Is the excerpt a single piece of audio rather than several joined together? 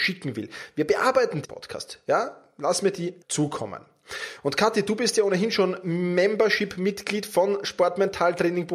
no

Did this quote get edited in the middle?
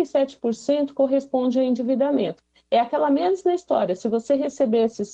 no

